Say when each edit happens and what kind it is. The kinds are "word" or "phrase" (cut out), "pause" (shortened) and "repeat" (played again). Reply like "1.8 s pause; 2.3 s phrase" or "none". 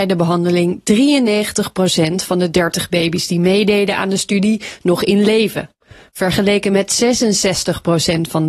none

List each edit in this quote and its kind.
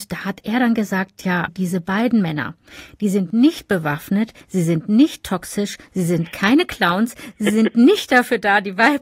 1.5 s word

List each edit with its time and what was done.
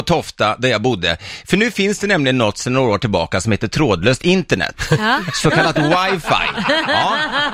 none

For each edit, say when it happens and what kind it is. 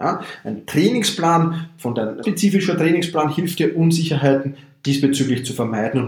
2.2 s word

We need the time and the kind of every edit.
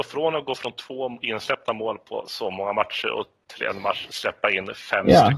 none

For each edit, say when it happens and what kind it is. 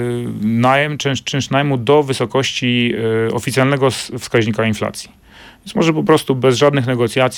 none

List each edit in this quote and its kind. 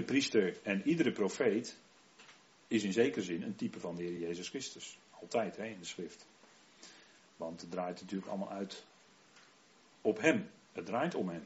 none

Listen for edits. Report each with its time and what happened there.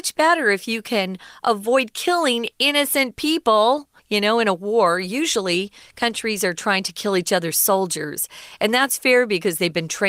4.0 s pause

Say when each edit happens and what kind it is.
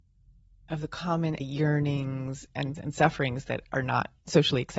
1.4 s word; 2.7 s word

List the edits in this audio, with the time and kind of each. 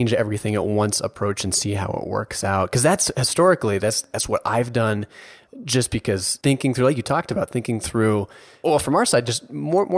none

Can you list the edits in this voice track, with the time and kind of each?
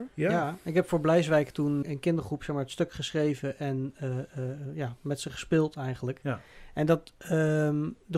1.8 s word

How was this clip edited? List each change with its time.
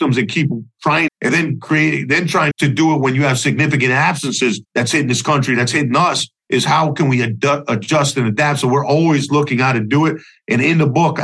1.1 s phrase; 2.5 s word; 4.6 s pause; 6.4 s pause

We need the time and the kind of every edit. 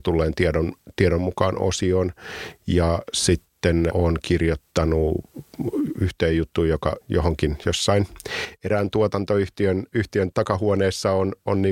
3.9 s word; 4.7 s pause; 7.0 s phrase; 10.3 s word

